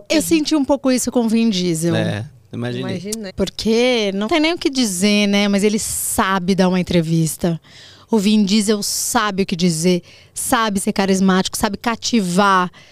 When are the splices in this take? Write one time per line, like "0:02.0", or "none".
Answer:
0:03.3
0:04.3